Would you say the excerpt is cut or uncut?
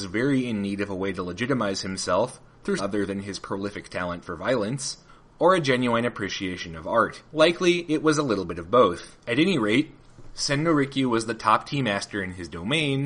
cut